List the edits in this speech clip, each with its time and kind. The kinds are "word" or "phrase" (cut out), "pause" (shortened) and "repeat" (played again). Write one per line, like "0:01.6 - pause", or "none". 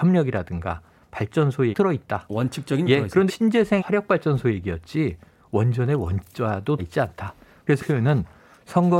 0:01.7 - word
0:02.9 - word
0:03.3 - word
0:03.8 - word
0:06.8 - word
0:07.8 - word